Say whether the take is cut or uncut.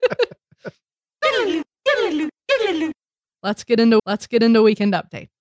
cut